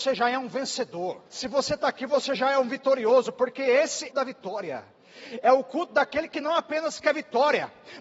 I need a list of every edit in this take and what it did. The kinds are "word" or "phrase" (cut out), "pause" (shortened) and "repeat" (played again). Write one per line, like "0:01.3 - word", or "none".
0:01.3 - pause
0:04.1 - phrase